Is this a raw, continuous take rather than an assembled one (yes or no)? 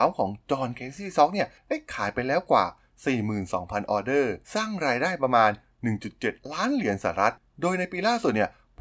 no